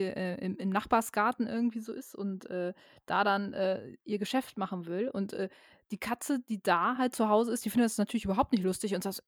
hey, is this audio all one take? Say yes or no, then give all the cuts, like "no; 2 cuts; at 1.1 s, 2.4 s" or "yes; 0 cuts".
yes; 0 cuts